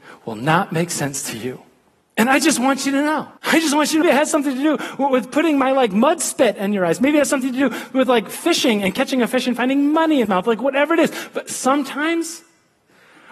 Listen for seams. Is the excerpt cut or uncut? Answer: cut